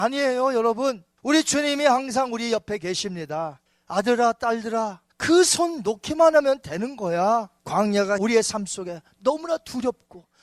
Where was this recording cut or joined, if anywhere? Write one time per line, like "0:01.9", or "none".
0:01.1
0:03.7
0:05.1
0:07.6